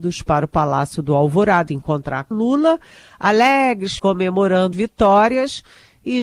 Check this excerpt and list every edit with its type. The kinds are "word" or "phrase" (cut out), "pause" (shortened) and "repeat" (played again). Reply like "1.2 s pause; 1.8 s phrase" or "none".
1.7 s word; 2.3 s word; 4.0 s word; 4.7 s word